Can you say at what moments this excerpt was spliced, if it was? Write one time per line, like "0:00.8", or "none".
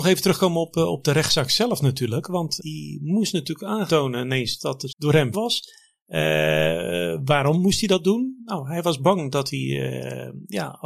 0:02.6
0:03.9
0:04.9
0:05.3